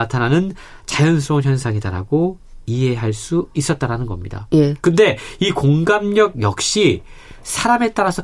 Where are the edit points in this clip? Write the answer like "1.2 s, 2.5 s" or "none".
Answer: none